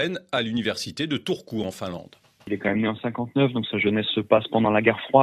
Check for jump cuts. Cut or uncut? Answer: uncut